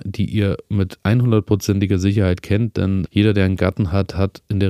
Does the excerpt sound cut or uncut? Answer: cut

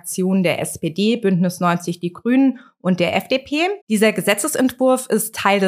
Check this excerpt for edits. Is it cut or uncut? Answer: cut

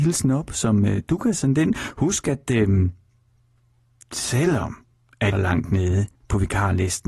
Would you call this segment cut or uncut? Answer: cut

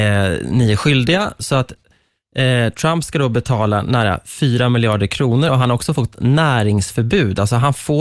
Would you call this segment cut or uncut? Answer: uncut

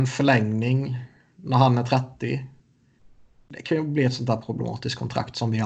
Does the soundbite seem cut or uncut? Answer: uncut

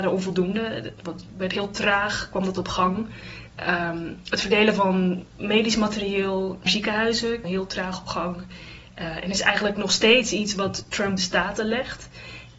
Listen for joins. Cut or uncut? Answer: cut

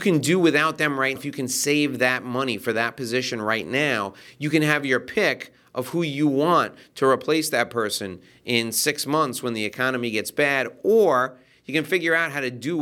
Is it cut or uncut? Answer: cut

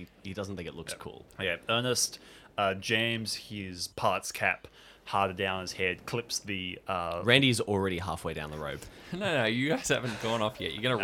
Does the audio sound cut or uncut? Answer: uncut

